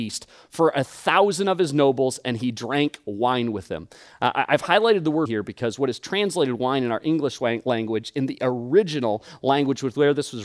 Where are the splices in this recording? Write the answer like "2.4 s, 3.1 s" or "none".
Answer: 5.3 s